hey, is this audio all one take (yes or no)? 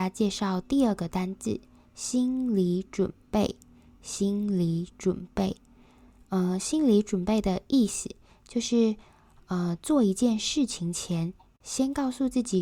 yes